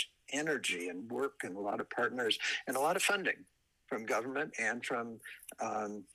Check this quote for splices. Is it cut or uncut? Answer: uncut